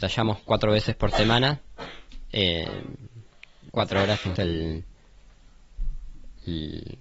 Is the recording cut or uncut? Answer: cut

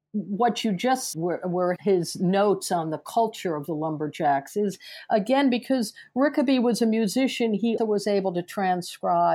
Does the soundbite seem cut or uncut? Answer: cut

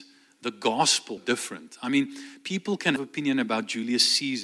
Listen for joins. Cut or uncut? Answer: cut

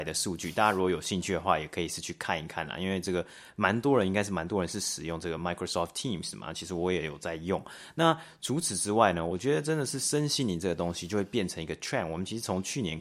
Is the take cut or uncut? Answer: uncut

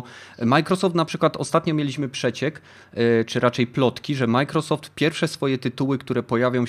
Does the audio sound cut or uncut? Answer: uncut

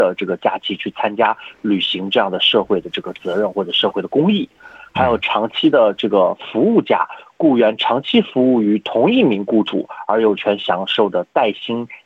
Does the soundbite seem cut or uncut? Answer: uncut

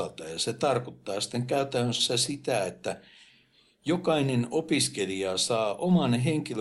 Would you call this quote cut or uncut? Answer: uncut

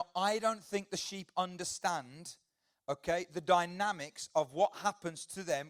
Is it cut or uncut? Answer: uncut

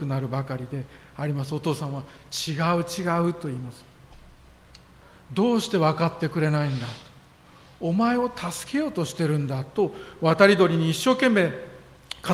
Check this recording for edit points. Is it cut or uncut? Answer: uncut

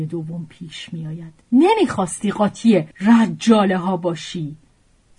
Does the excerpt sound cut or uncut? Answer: cut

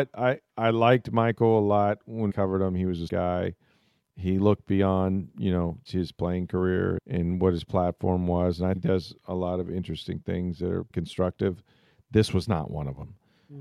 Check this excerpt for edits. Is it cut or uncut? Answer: cut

